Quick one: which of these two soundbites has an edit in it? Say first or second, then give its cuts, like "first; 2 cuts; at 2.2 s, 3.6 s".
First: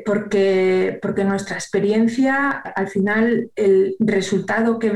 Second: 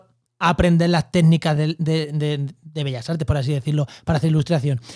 first; 1 cut; at 2.6 s